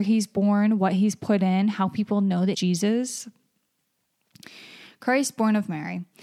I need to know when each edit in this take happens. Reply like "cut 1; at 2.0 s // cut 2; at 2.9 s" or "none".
cut 1; at 2.5 s

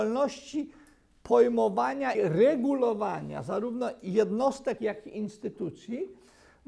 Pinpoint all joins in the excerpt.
cut 1; at 2.1 s // cut 2; at 4.8 s

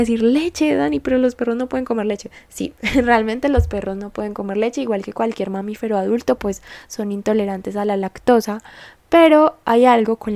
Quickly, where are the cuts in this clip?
none

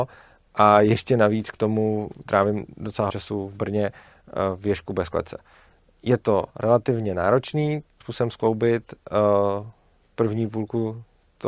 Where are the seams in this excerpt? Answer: cut 1; at 3.1 s // cut 2; at 6.5 s // cut 3; at 8.0 s

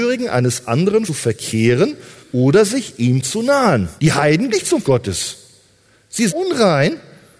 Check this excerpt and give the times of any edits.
cut 1; at 1.1 s // cut 2; at 2.2 s // cut 3; at 4.0 s // cut 4; at 4.5 s // cut 5; at 4.8 s // cut 6; at 6.3 s

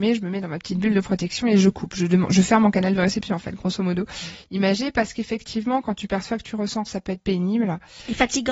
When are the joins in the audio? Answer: cut 1; at 6.9 s

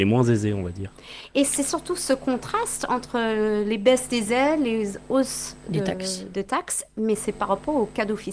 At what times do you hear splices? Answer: none

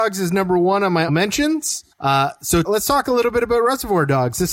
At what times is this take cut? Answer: cut 1; at 1.1 s // cut 2; at 1.9 s // cut 3; at 2.6 s

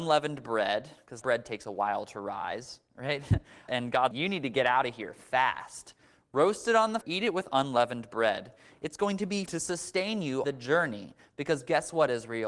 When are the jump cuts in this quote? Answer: cut 1; at 1.2 s // cut 2; at 3.7 s // cut 3; at 4.1 s // cut 4; at 7.0 s // cut 5; at 9.5 s // cut 6; at 10.4 s

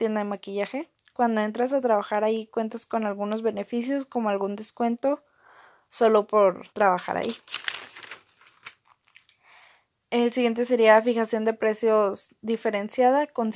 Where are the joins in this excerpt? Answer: cut 1; at 6.7 s

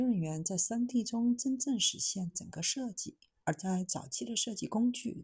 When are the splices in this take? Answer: none

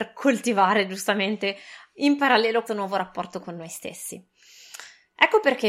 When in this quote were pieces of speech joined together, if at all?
cut 1; at 2.7 s

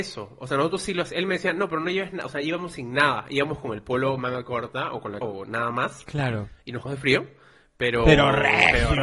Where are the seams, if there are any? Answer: cut 1; at 5.2 s // cut 2; at 6.8 s

